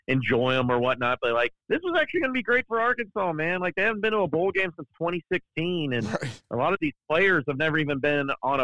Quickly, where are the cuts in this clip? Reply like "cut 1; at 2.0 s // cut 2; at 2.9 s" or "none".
cut 1; at 1.6 s